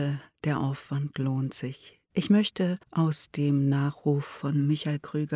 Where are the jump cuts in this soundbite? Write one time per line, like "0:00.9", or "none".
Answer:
0:02.8